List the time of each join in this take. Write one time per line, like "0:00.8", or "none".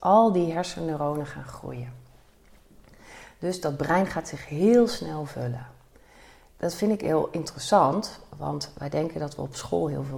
none

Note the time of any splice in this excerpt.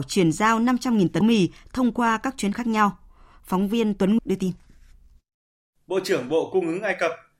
0:01.2
0:02.5
0:04.2

